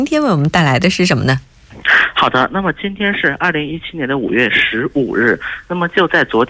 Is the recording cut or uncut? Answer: uncut